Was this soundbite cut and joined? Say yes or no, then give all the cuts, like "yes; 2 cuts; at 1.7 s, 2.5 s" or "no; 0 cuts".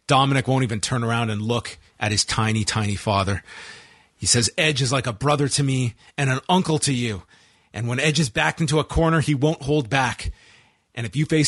no; 0 cuts